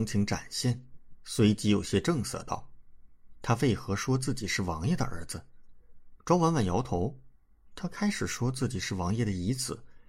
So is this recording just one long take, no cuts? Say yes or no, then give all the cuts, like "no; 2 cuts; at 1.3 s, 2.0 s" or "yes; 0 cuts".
yes; 0 cuts